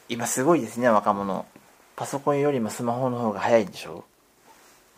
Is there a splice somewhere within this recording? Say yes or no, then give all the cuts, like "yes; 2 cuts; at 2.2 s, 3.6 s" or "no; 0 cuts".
yes; 1 cut; at 1.7 s